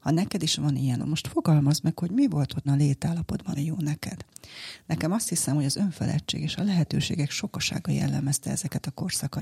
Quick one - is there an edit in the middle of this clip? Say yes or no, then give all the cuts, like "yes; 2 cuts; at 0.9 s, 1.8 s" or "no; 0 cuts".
yes; 3 cuts; at 1.0 s, 2.7 s, 3.6 s